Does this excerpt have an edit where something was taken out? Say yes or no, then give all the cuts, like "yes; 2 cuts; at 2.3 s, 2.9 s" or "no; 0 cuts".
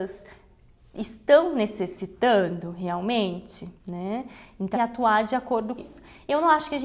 yes; 3 cuts; at 3.8 s, 4.7 s, 5.8 s